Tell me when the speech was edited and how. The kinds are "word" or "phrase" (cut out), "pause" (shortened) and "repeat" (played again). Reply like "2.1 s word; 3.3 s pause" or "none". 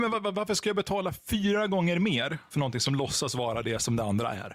none